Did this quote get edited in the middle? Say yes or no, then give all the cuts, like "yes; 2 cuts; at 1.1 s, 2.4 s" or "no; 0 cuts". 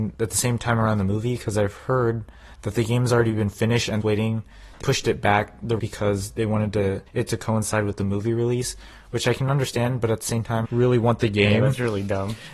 yes; 5 cuts; at 4.0 s, 4.8 s, 5.8 s, 7.1 s, 10.6 s